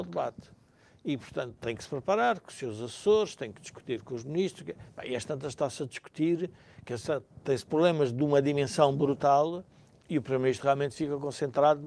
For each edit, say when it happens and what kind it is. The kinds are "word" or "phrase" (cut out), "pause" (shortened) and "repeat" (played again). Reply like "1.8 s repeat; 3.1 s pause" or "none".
none